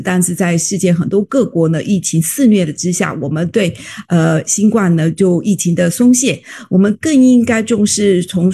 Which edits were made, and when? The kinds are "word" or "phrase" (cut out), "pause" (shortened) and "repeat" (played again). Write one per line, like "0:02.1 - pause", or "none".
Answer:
none